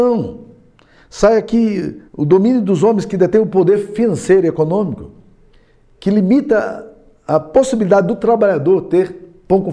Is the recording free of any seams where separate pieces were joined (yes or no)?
no